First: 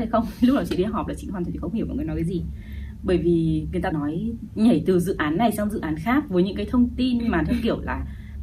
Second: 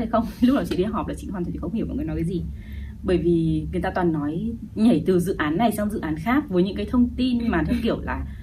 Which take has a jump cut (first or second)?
first